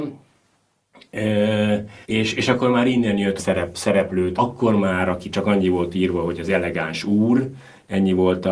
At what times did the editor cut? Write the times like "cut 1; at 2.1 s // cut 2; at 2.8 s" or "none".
cut 1; at 2.0 s // cut 2; at 3.4 s // cut 3; at 4.4 s